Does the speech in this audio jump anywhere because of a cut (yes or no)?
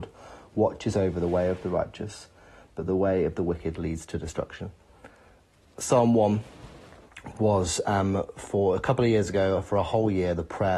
no